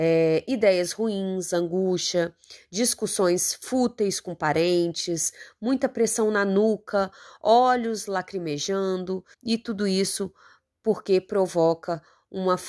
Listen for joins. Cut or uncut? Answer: cut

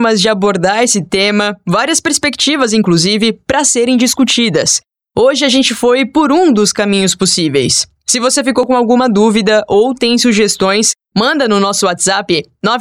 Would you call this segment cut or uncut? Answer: uncut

